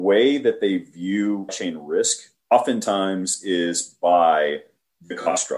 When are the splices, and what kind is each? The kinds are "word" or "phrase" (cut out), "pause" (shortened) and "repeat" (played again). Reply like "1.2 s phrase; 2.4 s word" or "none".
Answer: 1.5 s word; 2.4 s pause